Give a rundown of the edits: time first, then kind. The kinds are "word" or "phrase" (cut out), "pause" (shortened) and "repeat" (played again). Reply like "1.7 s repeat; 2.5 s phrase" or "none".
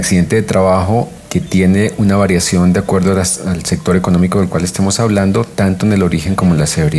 none